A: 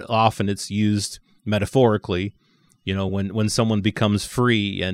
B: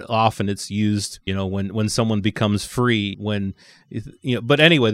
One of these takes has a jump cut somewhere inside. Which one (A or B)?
B